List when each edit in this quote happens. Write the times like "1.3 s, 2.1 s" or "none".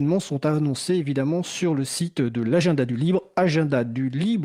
none